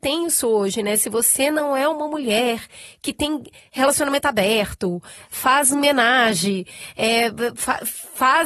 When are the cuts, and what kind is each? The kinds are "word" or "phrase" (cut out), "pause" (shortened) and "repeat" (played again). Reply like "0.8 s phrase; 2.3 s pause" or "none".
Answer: none